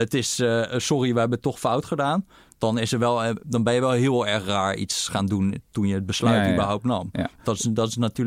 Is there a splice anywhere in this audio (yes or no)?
no